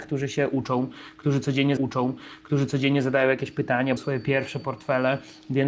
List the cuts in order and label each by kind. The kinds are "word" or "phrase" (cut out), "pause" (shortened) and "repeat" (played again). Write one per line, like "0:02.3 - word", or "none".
0:01.8 - repeat
0:04.0 - word